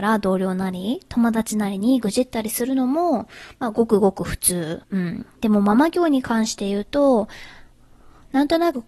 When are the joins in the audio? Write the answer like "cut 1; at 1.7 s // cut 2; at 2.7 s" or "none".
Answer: cut 1; at 4.8 s // cut 2; at 5.4 s